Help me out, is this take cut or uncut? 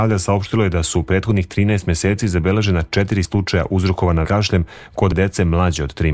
cut